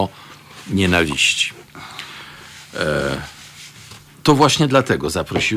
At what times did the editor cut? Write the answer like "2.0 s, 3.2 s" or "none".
none